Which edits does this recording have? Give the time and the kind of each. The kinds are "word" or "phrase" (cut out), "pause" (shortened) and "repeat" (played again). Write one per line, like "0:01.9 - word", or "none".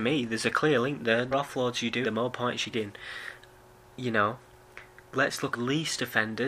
0:01.3 - word
0:02.0 - word
0:02.7 - word
0:05.5 - phrase

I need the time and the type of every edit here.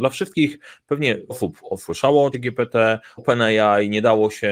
0:01.3 - word
0:02.3 - word
0:03.2 - word

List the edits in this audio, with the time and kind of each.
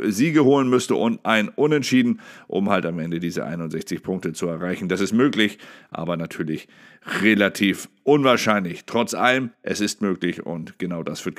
0:09.5 - pause

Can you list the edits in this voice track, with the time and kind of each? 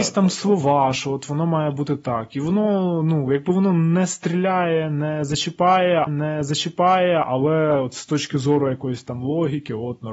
0:06.1 - repeat

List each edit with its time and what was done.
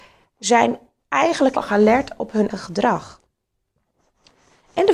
0:01.6 - word
0:02.5 - word

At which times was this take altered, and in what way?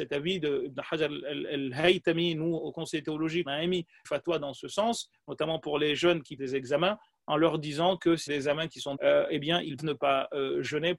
0:02.6 - word
0:03.5 - word
0:04.0 - word
0:06.4 - word
0:08.3 - word
0:09.0 - word
0:09.8 - word

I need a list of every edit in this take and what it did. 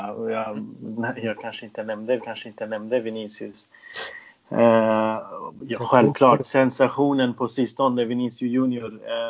0:02.2 - repeat

